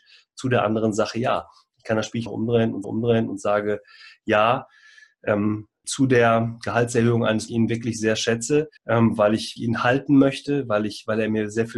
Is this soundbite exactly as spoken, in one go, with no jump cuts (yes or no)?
no